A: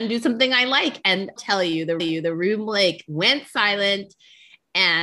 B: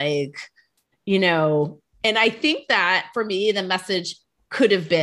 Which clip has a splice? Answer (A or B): A